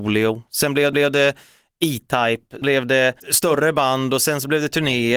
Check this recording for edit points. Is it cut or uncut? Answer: cut